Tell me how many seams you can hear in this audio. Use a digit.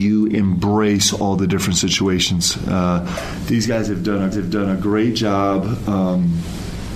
1